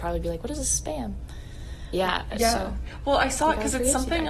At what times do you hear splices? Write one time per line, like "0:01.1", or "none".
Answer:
0:01.9